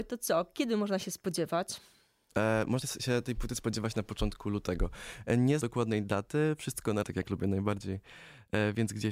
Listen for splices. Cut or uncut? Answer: cut